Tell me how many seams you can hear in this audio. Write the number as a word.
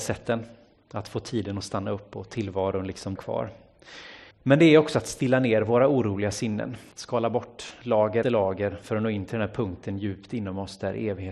four